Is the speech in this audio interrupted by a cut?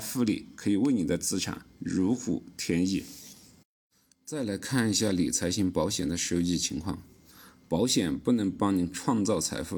no; 0 cuts

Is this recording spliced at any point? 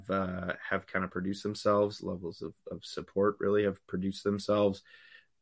no; 0 cuts

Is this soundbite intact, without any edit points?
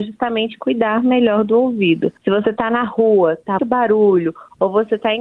no; 2 cuts; at 2.2 s, 3.6 s

